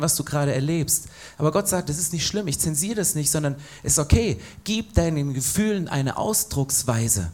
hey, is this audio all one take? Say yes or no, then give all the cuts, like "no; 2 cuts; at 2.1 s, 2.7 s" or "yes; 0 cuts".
yes; 0 cuts